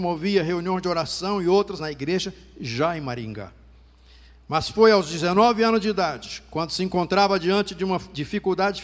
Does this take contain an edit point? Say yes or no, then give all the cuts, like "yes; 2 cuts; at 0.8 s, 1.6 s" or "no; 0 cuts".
yes; 1 cut; at 1.8 s